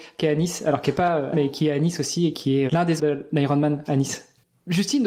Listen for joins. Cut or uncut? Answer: cut